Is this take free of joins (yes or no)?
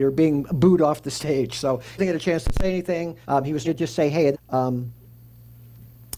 no